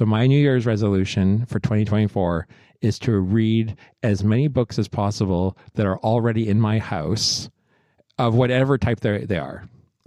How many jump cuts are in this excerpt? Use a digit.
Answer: 0